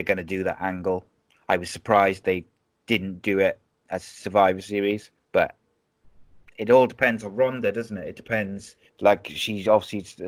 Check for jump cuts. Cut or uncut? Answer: cut